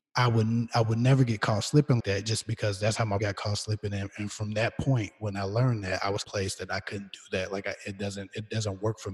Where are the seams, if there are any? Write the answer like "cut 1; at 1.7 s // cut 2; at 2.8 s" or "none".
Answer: cut 1; at 2.0 s // cut 2; at 3.2 s // cut 3; at 6.2 s